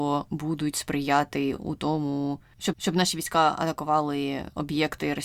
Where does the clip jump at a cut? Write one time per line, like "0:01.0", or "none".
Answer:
0:01.6
0:02.7

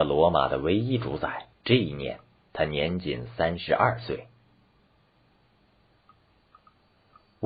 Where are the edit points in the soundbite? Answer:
0:01.5

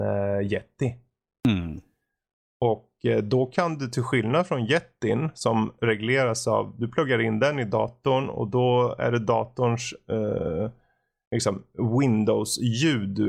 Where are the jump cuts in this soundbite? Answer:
none

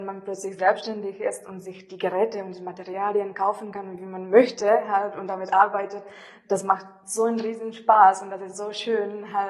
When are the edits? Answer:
none

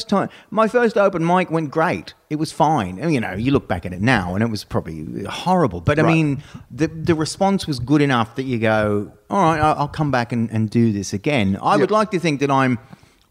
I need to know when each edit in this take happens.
none

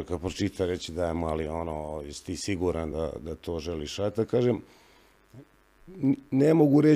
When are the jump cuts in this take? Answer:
none

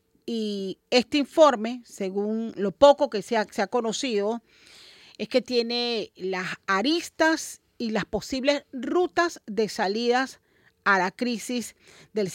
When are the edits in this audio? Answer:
none

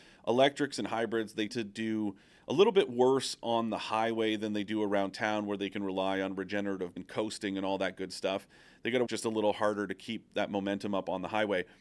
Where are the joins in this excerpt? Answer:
0:01.5
0:07.0
0:09.1

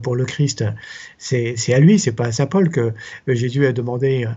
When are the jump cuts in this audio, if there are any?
none

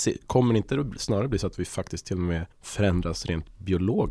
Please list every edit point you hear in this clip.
0:02.5

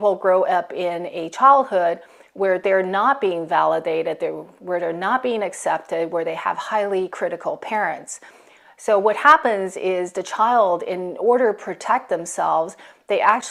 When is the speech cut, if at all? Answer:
none

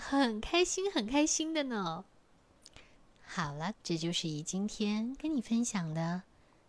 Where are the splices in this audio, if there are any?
0:03.7

